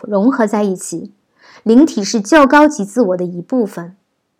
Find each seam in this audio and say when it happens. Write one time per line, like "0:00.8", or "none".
none